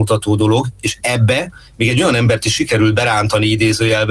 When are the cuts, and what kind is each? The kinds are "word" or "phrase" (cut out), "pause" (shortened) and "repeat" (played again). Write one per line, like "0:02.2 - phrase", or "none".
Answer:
none